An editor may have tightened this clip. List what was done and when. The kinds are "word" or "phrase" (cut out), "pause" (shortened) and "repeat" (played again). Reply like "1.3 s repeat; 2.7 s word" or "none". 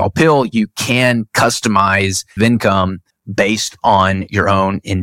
2.4 s word; 3.1 s pause

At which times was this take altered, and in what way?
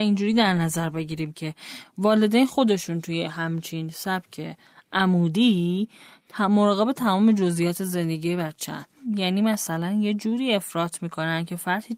none

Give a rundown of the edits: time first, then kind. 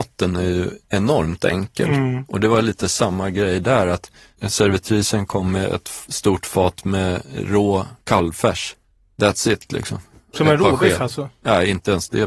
none

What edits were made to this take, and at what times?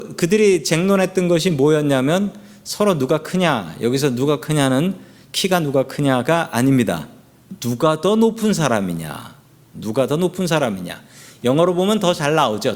none

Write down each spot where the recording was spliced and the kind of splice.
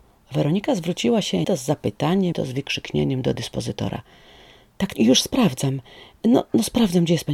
1.4 s word; 2.3 s word; 4.9 s word

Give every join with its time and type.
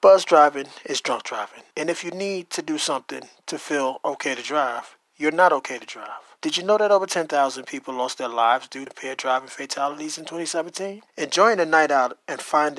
1.7 s pause; 6.4 s pause; 8.9 s word; 11.1 s pause

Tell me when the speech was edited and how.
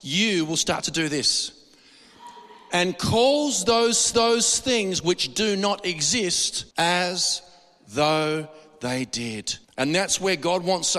4.1 s repeat; 6.7 s pause; 9.6 s pause

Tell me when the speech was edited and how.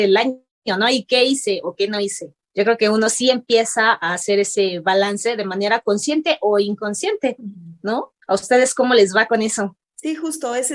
2.4 s pause; 8.2 s pause; 9.8 s pause

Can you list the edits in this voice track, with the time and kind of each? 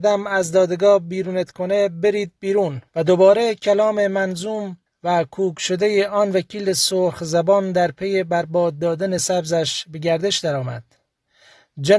2.9 s pause; 4.9 s pause; 9.2 s word

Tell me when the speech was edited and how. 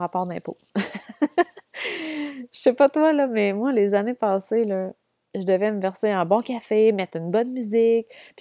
none

